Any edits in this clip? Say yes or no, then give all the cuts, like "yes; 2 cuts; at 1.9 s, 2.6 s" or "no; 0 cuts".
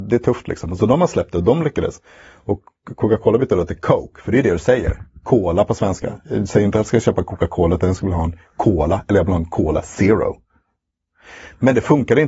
no; 0 cuts